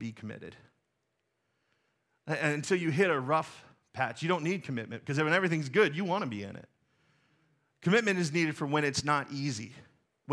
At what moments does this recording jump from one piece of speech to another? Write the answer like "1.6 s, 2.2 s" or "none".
none